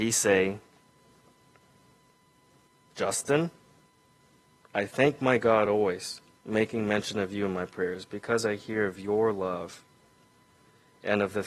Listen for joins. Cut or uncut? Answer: uncut